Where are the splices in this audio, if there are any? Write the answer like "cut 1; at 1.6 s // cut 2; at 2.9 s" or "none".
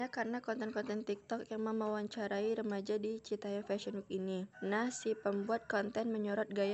cut 1; at 4.5 s